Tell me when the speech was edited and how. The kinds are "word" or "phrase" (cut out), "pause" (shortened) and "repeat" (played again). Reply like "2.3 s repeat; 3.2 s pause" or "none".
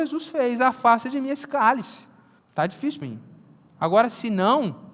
2.4 s pause; 3.0 s word